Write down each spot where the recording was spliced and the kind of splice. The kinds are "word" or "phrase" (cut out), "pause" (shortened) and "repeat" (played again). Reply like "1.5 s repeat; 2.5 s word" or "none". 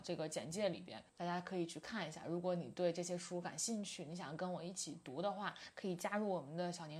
1.1 s pause

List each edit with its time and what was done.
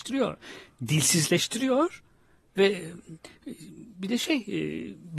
none

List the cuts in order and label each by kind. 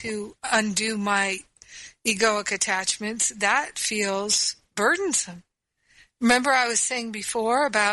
none

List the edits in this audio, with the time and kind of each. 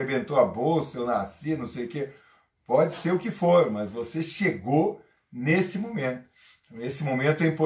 none

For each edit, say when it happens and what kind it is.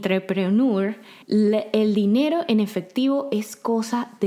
1.2 s pause

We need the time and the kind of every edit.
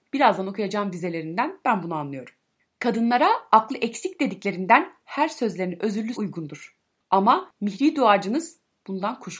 6.1 s word

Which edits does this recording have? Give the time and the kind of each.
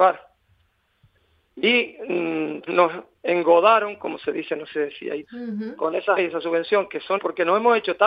2.7 s word; 5.2 s word; 6.2 s phrase; 7.2 s word

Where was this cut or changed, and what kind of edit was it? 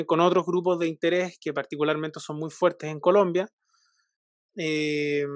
none

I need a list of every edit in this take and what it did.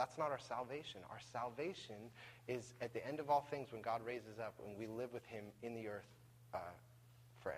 none

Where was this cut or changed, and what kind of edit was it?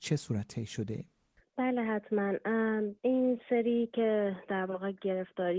3.0 s pause

